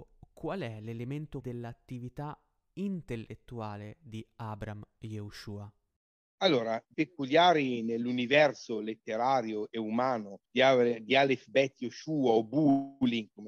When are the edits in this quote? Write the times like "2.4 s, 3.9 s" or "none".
1.4 s, 6.9 s, 10.5 s